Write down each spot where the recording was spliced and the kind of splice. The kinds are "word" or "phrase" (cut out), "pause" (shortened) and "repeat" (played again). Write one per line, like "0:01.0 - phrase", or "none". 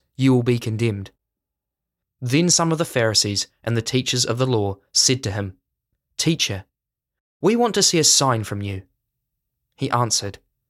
none